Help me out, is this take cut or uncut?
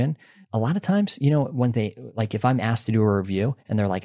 uncut